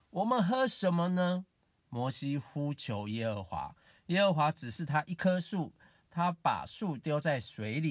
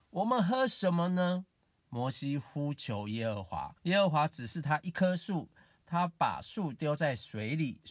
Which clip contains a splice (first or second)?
second